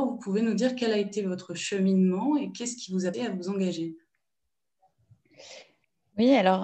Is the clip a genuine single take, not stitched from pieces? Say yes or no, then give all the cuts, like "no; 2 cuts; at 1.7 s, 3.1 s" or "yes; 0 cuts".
no; 1 cut; at 3.1 s